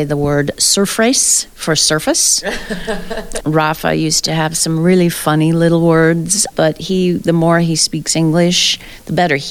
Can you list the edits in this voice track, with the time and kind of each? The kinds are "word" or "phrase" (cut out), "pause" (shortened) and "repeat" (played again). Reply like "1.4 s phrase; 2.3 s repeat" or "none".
3.4 s word; 6.5 s word